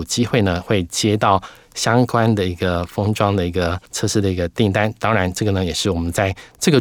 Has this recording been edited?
yes; 1 cut; at 3.9 s

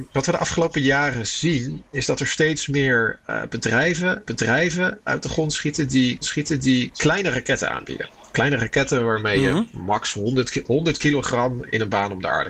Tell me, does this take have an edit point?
yes; 2 cuts; at 4.2 s, 6.2 s

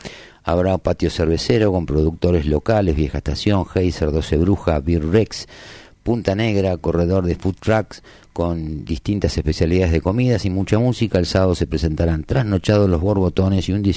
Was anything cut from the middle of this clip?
no; 0 cuts

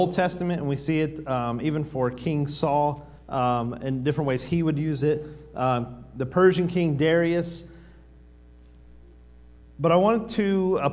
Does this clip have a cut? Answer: yes; 1 cut; at 3.2 s

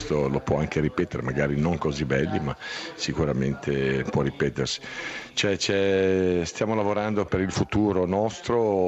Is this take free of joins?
no; 1 cut; at 7.3 s

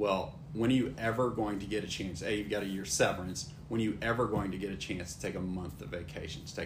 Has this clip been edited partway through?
no; 0 cuts

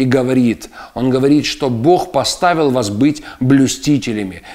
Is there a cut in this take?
no; 0 cuts

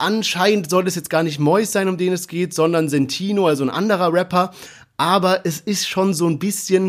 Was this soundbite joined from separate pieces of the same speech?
no; 0 cuts

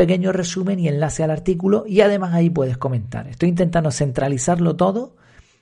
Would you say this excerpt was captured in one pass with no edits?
yes; 0 cuts

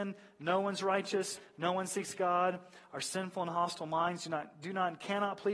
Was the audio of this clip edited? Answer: no; 0 cuts

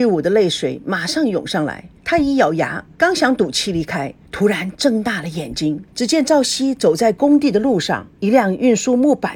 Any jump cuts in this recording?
yes; 5 cuts; at 2.0 s, 2.9 s, 4.2 s, 5.9 s, 8.1 s

